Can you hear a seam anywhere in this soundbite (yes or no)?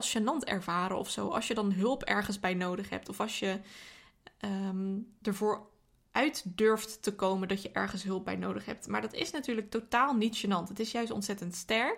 yes